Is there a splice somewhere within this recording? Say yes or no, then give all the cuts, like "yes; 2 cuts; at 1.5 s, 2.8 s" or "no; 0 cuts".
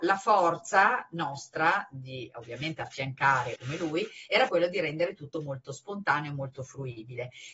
yes; 2 cuts; at 3.6 s, 4.5 s